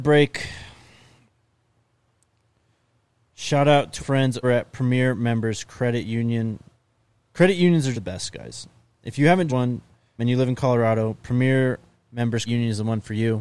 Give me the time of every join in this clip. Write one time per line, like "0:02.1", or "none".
0:04.0
0:04.4
0:07.9
0:09.5
0:10.2
0:12.5

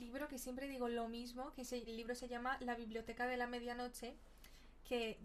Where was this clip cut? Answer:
0:01.9

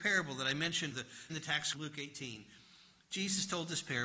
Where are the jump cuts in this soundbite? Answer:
0:00.9
0:01.3
0:01.7

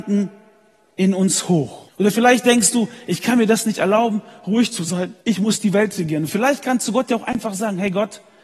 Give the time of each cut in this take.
0:01.9
0:05.2

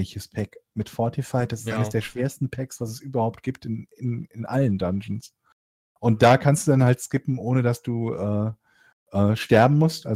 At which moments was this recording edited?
none

